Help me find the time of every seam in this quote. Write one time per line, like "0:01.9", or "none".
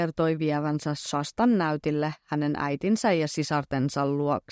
none